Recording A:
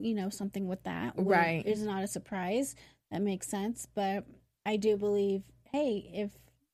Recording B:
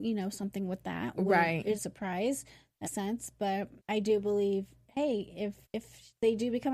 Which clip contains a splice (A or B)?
B